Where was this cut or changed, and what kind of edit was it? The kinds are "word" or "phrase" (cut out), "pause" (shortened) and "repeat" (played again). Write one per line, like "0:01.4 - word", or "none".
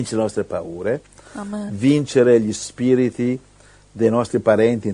none